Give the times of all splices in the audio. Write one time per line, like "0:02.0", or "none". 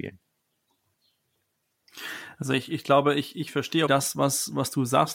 0:03.9